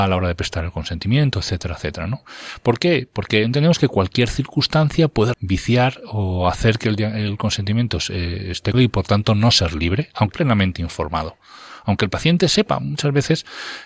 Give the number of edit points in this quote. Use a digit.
3